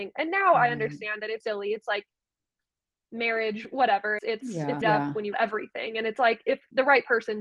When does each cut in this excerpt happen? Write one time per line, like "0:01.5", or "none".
0:01.4
0:04.2
0:04.8
0:05.3